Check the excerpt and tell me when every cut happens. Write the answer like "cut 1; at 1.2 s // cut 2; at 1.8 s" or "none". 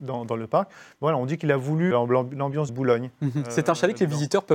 cut 1; at 1.9 s // cut 2; at 2.7 s